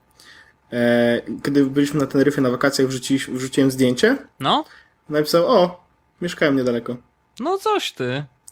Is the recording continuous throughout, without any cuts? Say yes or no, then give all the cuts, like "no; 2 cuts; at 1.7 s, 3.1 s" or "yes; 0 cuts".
yes; 0 cuts